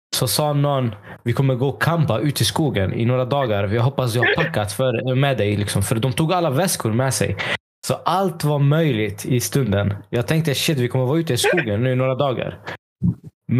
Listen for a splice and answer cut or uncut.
uncut